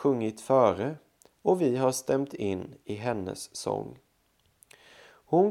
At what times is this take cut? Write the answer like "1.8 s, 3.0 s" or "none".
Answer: none